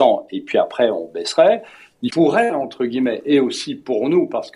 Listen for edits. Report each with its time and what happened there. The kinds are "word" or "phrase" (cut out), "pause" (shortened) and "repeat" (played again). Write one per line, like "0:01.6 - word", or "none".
0:02.1 - phrase